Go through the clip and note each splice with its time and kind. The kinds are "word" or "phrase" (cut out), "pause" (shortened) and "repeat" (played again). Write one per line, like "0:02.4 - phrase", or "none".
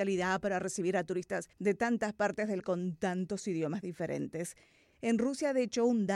0:01.5 - pause
0:02.6 - word

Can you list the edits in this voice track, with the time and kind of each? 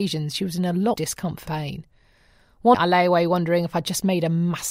0:01.0 - word
0:01.5 - word
0:02.7 - word

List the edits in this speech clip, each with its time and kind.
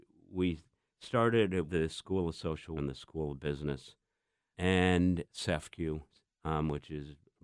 0:01.7 - word
0:02.8 - word
0:04.5 - word
0:05.3 - word

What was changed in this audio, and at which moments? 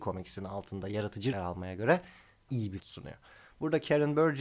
0:01.3 - word
0:02.5 - word
0:02.8 - word

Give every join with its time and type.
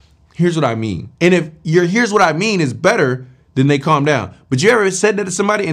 0:01.1 - pause

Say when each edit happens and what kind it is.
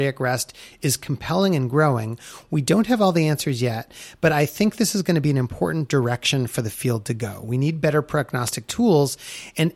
none

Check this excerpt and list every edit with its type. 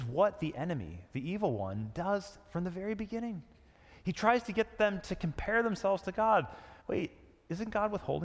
0:06.8 - pause

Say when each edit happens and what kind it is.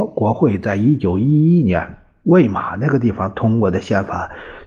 none

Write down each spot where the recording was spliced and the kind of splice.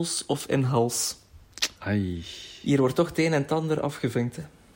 none

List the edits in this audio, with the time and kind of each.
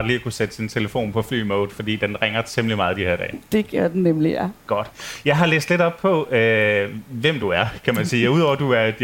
none

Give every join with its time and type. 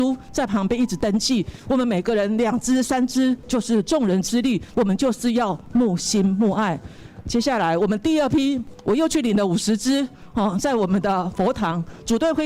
none

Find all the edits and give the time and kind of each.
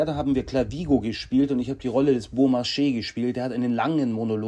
none

